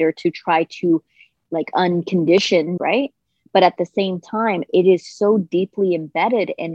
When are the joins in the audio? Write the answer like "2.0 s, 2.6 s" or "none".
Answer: 1.4 s, 2.8 s